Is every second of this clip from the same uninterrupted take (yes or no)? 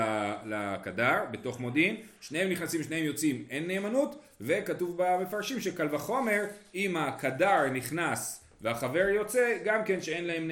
yes